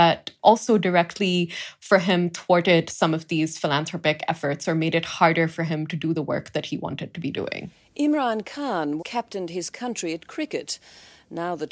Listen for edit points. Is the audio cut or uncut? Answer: cut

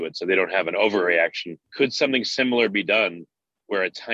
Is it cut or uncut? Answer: cut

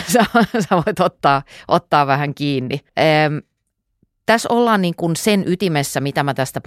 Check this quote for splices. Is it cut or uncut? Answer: cut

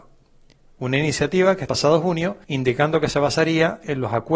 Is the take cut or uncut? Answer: cut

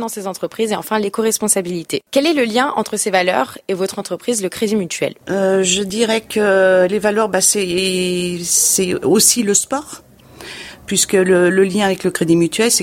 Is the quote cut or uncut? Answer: cut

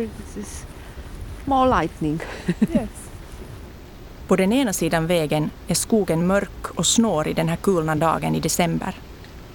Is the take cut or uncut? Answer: uncut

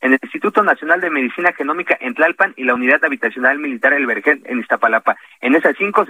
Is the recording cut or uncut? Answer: uncut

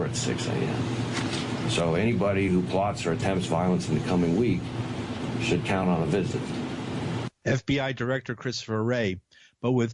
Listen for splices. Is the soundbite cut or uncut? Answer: uncut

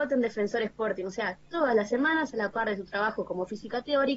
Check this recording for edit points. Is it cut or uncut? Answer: uncut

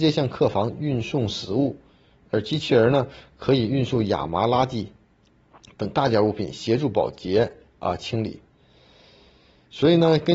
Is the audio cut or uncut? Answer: uncut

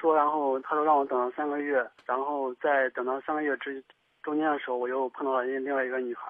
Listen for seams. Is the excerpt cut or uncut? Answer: cut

